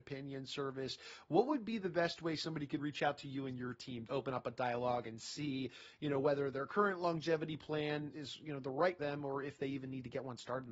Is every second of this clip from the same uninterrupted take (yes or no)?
no